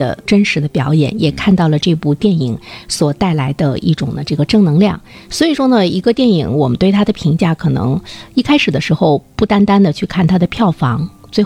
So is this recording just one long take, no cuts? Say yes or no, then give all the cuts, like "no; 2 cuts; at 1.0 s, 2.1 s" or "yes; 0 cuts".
yes; 0 cuts